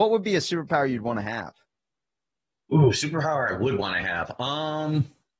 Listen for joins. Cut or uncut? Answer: uncut